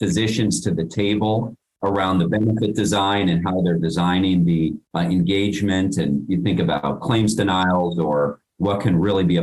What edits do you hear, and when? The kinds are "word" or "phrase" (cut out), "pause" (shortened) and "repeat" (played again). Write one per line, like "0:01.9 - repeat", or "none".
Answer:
0:04.8 - pause